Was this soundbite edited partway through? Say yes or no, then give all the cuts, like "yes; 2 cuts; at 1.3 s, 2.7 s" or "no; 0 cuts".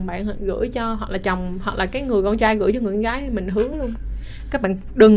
no; 0 cuts